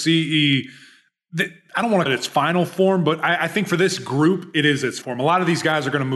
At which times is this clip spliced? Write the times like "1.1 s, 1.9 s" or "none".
2.1 s, 5.0 s